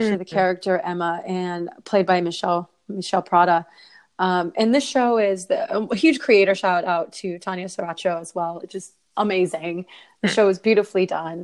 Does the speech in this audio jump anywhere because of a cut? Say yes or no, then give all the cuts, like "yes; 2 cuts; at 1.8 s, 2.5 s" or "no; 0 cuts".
no; 0 cuts